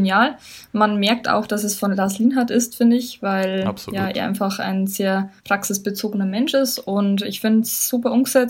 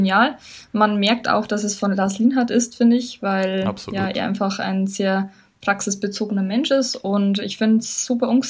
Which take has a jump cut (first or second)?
first